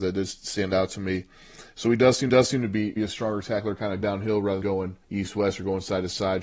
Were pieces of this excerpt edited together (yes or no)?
yes